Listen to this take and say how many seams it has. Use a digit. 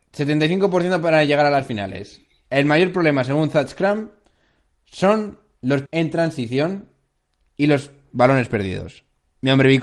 1